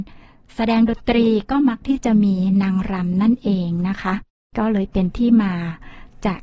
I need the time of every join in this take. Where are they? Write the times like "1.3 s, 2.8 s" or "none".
none